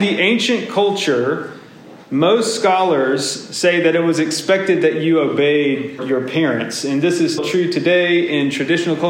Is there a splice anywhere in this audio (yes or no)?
yes